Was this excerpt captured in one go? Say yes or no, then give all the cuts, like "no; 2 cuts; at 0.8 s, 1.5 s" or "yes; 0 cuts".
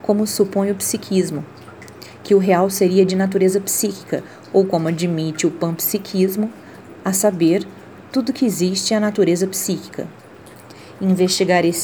yes; 0 cuts